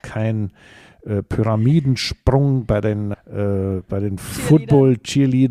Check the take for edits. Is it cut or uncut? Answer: cut